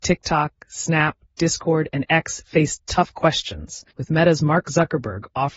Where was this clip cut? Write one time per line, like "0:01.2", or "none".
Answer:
0:03.9